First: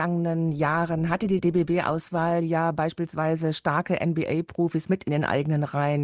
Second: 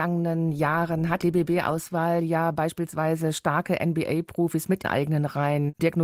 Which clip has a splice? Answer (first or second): second